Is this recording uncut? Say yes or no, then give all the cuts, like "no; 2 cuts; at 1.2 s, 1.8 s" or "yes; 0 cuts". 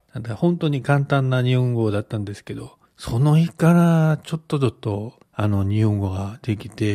no; 2 cuts; at 2.8 s, 5.2 s